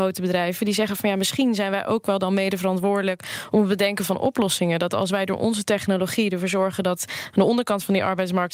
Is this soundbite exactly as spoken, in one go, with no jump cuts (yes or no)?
yes